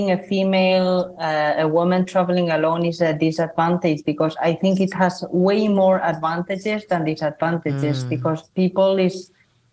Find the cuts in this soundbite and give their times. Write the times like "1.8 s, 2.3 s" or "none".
none